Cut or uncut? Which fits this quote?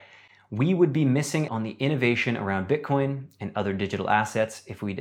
cut